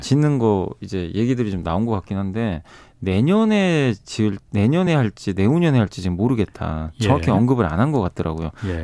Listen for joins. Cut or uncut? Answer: uncut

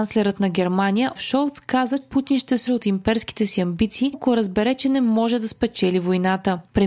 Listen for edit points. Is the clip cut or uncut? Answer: cut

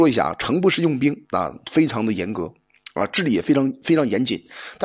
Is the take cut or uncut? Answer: cut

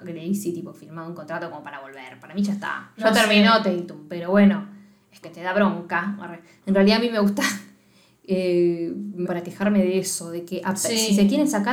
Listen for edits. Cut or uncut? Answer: cut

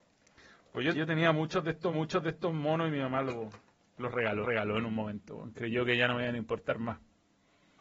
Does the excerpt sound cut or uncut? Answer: cut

